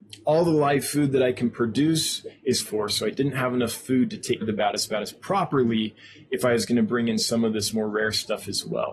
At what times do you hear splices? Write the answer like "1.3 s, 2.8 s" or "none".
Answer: 2.6 s, 4.4 s